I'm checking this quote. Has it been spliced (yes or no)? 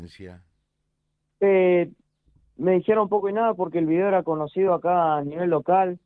no